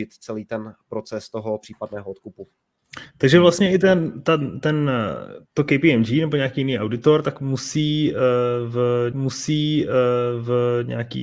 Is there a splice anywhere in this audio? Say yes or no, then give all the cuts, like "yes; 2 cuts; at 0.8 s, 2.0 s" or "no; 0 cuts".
yes; 2 cuts; at 5.5 s, 9.1 s